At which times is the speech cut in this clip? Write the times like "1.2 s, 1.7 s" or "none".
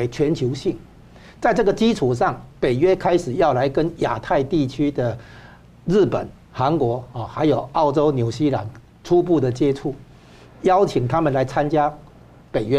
none

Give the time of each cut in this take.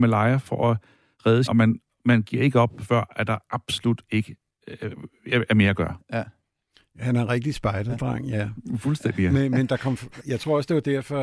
1.5 s, 10.2 s

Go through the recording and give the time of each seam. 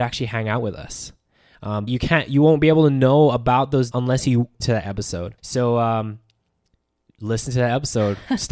1.9 s, 3.9 s, 4.6 s, 5.4 s

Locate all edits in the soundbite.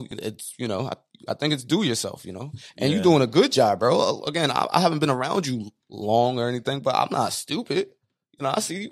5.8 s

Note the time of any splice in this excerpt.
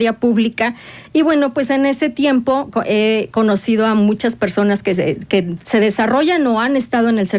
none

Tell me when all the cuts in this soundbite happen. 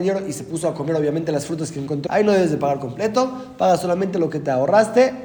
2.1 s

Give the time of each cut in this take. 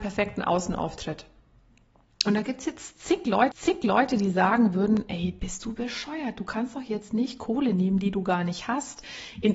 3.5 s

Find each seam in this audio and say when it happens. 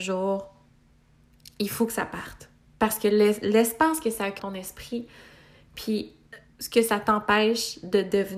4.4 s, 6.5 s

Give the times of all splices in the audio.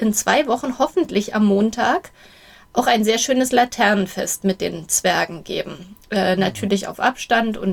none

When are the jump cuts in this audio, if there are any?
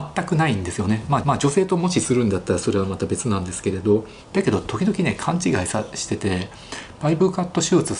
1.2 s

